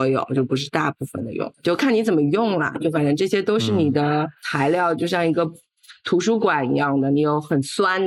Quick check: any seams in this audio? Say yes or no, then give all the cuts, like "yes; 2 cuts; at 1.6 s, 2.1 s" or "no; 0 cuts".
yes; 1 cut; at 1.5 s